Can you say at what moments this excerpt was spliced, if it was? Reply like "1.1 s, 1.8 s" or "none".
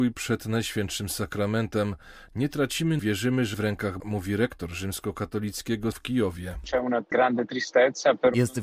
3.0 s, 3.5 s, 4.0 s, 5.9 s